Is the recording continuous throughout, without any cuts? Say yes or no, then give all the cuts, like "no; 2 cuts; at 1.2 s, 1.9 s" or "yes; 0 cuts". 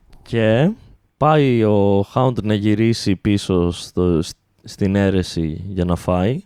yes; 0 cuts